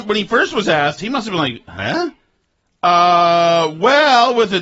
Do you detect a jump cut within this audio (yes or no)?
yes